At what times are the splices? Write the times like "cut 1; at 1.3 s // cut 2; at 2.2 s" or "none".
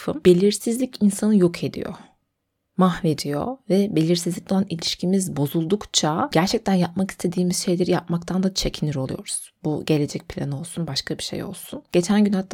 none